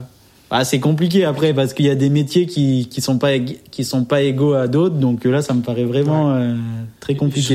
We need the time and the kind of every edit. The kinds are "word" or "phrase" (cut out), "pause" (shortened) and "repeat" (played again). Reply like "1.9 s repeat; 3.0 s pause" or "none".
none